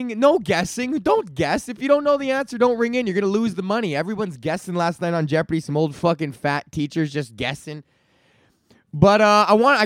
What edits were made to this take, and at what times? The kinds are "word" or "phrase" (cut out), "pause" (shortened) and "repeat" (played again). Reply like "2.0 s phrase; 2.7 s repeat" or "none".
none

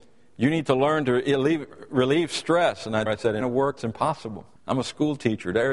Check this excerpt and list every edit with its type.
3.1 s word; 3.4 s phrase; 3.8 s word; 4.6 s pause

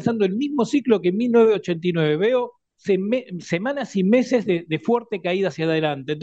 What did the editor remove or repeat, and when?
2.7 s pause

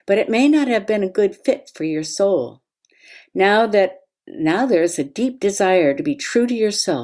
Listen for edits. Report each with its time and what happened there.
none

